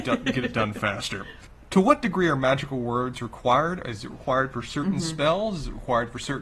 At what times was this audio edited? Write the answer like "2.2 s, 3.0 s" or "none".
none